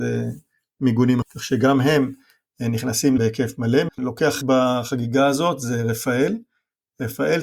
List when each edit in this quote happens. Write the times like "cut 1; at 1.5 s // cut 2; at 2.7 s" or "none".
cut 1; at 1.2 s // cut 2; at 3.2 s // cut 3; at 3.9 s // cut 4; at 4.4 s